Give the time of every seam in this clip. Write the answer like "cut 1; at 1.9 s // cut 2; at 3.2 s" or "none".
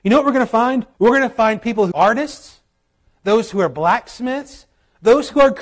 cut 1; at 0.9 s // cut 2; at 1.9 s